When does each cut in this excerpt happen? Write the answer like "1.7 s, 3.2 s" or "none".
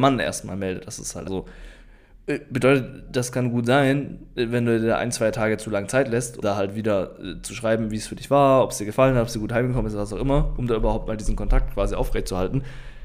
1.2 s, 6.4 s